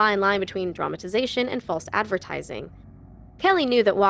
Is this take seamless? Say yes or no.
yes